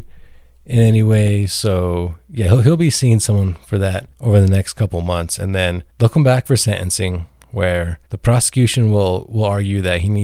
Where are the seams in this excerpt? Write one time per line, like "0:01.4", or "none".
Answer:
0:04.1
0:05.9
0:08.1